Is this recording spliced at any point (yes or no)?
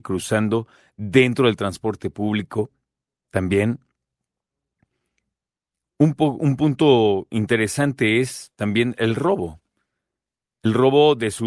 no